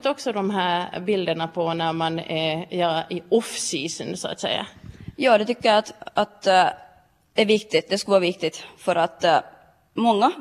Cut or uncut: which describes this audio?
uncut